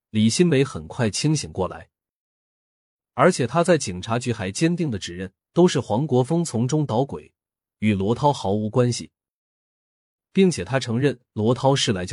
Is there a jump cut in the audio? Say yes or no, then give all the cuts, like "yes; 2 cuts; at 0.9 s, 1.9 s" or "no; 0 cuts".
yes; 1 cut; at 5.4 s